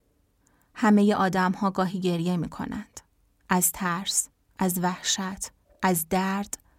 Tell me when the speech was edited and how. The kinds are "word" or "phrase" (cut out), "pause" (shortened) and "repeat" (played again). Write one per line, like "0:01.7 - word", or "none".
none